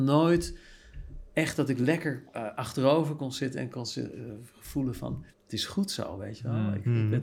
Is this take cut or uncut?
cut